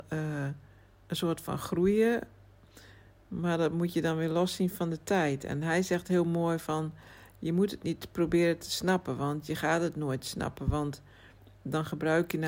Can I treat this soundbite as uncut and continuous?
yes; 0 cuts

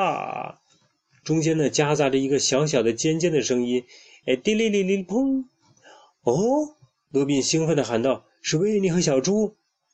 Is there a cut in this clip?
no; 0 cuts

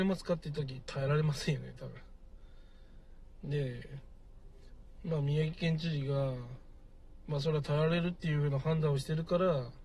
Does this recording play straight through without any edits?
yes; 0 cuts

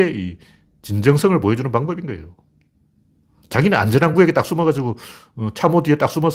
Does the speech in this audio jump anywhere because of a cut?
no; 0 cuts

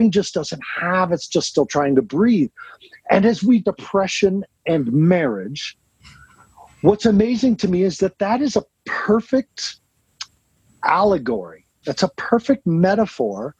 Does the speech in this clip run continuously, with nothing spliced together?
no; 1 cut; at 3.6 s

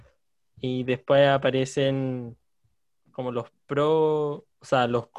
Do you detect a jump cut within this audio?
no; 0 cuts

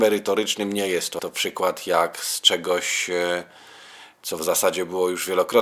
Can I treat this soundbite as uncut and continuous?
no; 1 cut; at 1.2 s

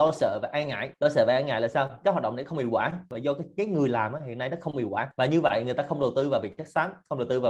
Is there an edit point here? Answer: no; 0 cuts

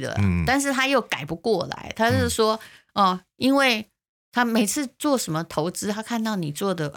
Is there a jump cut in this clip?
no; 0 cuts

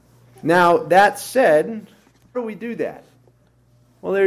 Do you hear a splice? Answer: yes; 1 cut; at 2.3 s

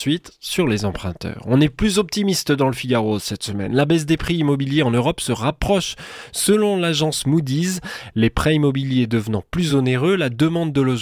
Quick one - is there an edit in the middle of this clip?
no; 0 cuts

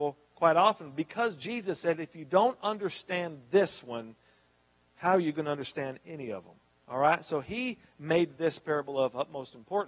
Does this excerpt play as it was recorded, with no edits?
yes; 0 cuts

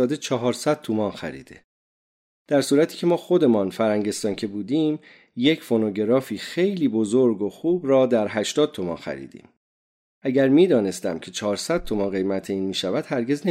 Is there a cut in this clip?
no; 0 cuts

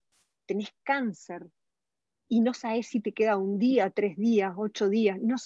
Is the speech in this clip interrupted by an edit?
no; 0 cuts

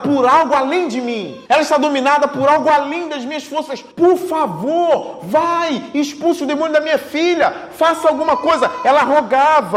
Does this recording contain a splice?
yes; 2 cuts; at 1.5 s, 3.9 s

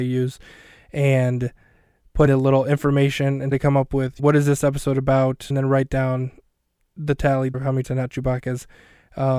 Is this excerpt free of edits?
no; 6 cuts; at 2.3 s, 3.5 s, 4.2 s, 5.5 s, 7.5 s, 7.8 s

